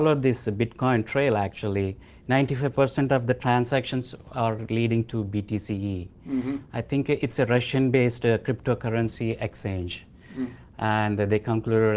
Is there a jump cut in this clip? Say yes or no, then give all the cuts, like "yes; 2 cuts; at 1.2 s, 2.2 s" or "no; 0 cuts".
no; 0 cuts